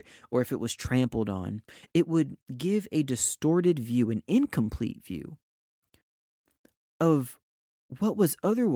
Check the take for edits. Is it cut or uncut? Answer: uncut